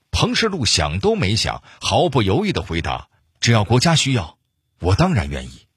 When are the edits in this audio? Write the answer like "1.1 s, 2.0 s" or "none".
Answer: none